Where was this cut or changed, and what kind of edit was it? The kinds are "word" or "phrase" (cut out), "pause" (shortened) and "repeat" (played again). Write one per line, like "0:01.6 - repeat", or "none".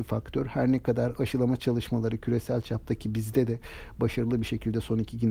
none